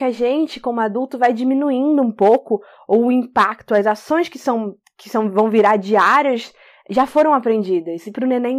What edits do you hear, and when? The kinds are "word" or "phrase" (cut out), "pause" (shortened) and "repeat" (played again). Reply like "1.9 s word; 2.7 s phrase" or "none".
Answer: none